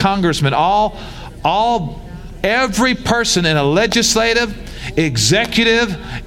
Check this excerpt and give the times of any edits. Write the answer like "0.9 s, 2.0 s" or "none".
2.4 s